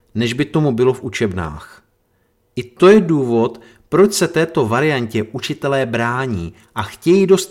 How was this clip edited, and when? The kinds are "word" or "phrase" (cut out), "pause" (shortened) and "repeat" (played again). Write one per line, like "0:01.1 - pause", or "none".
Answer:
none